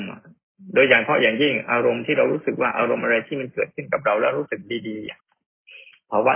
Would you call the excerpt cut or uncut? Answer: cut